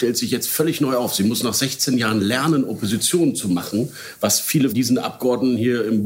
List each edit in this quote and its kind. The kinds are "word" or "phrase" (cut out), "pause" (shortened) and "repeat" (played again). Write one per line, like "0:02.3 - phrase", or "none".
0:04.7 - word